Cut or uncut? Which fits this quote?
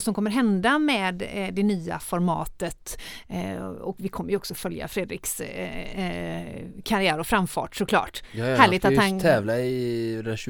uncut